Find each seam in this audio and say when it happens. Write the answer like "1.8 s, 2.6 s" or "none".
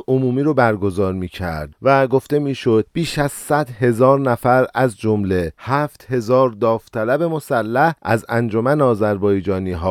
none